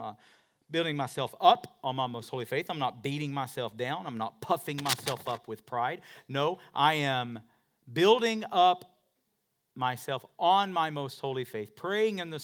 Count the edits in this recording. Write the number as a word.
zero